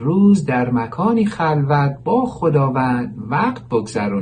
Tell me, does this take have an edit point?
no; 0 cuts

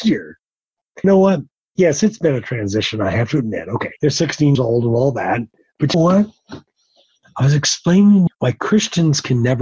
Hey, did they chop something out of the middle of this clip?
yes; 6 cuts; at 1.0 s, 4.0 s, 4.5 s, 5.6 s, 5.9 s, 8.3 s

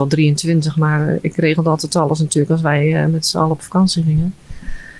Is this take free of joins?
yes; 0 cuts

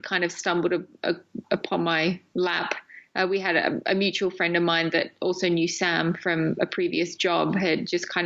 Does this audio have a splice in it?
no; 0 cuts

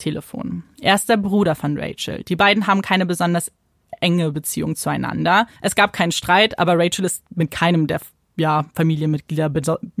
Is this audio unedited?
no; 1 cut; at 5.6 s

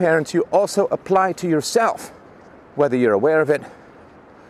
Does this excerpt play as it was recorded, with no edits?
no; 1 cut; at 2.3 s

